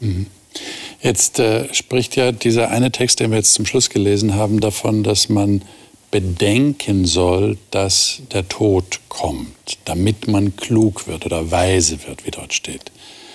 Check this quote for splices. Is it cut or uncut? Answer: uncut